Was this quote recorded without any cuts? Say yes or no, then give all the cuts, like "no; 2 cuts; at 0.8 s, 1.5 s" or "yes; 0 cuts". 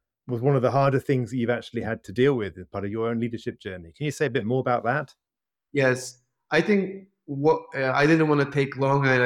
yes; 0 cuts